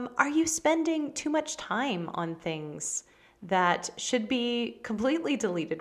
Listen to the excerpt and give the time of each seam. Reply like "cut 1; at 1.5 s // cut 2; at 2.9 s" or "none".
none